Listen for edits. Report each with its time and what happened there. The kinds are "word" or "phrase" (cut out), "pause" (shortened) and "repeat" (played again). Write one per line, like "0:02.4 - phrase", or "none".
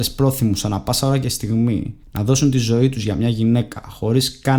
0:02.0 - pause